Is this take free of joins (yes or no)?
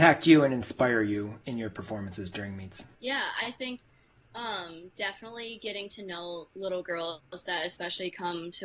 no